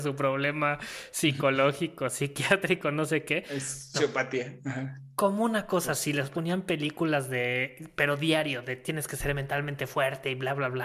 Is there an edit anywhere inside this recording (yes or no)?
yes